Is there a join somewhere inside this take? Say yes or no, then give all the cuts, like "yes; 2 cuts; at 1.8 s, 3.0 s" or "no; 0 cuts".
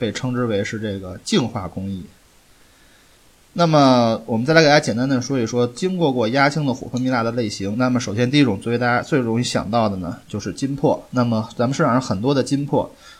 no; 0 cuts